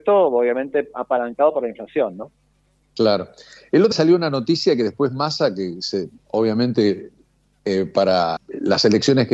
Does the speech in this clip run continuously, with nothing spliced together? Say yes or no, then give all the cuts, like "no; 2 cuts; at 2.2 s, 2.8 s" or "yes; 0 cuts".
no; 2 cuts; at 3.9 s, 8.4 s